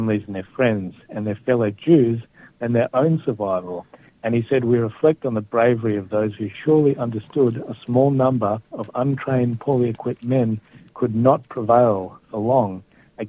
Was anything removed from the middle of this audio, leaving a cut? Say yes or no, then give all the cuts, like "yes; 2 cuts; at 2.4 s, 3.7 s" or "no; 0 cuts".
no; 0 cuts